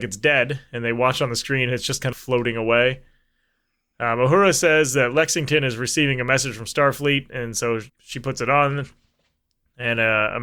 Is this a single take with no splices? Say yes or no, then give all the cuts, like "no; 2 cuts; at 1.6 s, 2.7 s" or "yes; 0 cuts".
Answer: no; 2 cuts; at 2.1 s, 7.9 s